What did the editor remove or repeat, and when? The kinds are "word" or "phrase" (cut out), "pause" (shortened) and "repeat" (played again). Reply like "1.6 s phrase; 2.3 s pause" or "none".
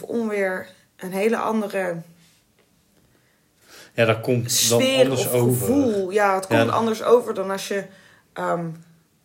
none